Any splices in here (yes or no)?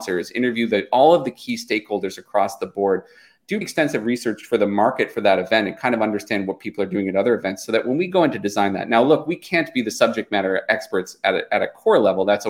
yes